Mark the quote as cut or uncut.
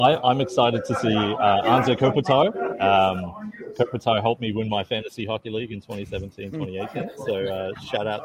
uncut